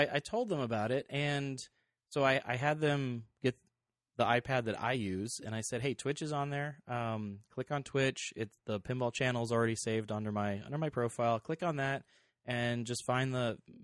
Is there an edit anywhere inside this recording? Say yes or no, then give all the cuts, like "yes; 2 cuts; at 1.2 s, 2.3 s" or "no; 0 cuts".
no; 0 cuts